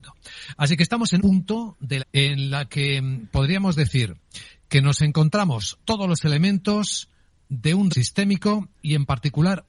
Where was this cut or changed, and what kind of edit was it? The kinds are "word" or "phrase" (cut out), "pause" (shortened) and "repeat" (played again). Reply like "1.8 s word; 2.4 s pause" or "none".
1.2 s word; 2.0 s phrase; 5.8 s word; 7.9 s word; 8.7 s pause